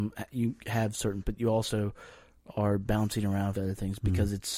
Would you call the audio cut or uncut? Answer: cut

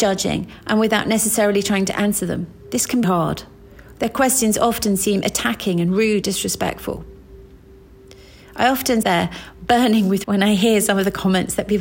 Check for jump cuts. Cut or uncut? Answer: cut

